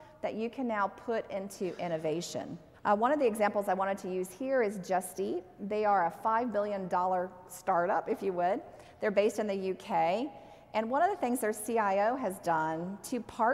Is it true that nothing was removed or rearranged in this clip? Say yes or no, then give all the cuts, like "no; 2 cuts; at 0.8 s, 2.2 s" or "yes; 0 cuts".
no; 1 cut; at 2.7 s